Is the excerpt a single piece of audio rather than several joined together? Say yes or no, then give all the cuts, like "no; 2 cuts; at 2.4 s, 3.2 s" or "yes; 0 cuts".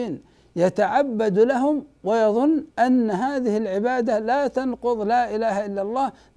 no; 1 cut; at 2.7 s